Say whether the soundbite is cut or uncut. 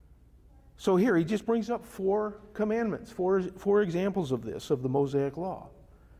uncut